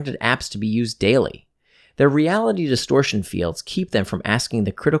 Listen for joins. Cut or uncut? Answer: uncut